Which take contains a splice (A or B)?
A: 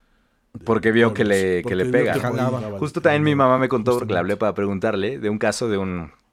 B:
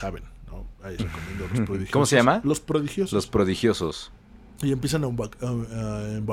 B